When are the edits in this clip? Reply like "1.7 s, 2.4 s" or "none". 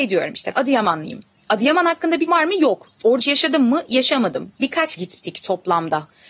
2.3 s, 3.2 s, 5.0 s